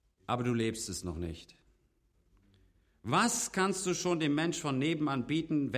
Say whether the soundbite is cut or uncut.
uncut